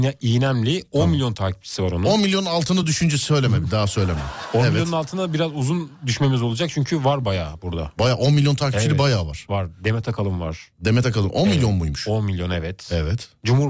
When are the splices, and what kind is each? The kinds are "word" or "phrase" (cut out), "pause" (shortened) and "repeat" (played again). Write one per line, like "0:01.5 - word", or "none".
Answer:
none